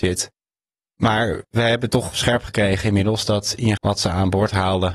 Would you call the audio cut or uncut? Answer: cut